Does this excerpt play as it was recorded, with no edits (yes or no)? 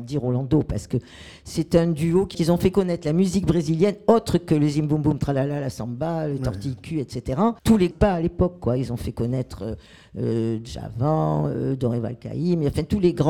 no